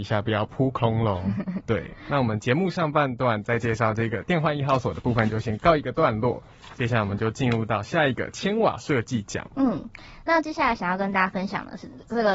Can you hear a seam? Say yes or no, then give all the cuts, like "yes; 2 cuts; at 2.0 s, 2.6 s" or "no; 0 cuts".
no; 0 cuts